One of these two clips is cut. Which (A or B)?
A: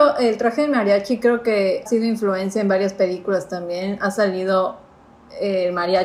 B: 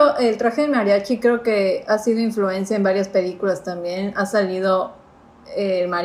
A